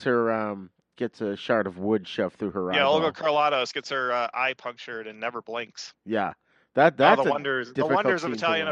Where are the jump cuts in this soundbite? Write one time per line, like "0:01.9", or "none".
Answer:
none